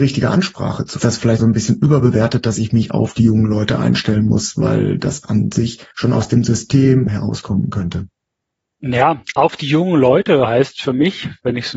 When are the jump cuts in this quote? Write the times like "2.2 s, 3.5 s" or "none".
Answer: 1.0 s, 1.4 s, 5.9 s, 7.1 s